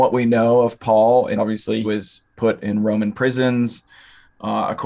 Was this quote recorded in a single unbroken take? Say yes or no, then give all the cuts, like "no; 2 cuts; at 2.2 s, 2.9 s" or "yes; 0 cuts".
no; 2 cuts; at 1.3 s, 1.8 s